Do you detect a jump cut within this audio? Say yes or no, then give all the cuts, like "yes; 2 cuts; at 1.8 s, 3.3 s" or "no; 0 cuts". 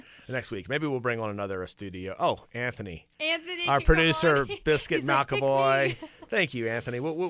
no; 0 cuts